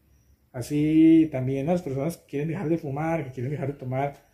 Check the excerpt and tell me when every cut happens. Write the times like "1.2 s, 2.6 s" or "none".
none

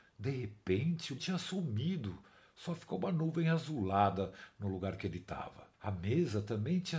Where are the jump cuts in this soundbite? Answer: 1.2 s, 5.7 s

